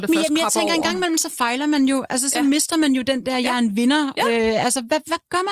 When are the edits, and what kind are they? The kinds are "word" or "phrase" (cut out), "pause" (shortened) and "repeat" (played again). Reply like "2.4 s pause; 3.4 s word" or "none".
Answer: none